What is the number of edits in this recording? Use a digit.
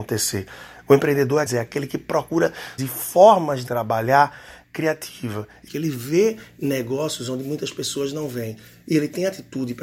4